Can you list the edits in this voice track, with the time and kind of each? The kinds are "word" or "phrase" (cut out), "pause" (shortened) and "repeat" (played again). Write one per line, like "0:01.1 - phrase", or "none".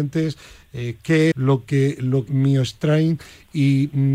0:01.3 - word
0:02.3 - word